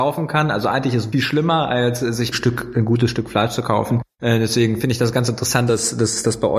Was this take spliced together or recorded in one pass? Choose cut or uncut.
cut